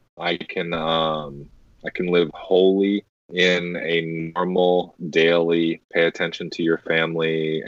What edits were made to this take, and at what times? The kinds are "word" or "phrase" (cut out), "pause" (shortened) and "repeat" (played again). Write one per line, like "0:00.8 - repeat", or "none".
none